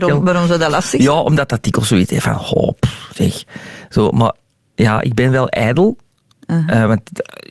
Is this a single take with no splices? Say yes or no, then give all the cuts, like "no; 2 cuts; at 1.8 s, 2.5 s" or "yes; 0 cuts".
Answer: yes; 0 cuts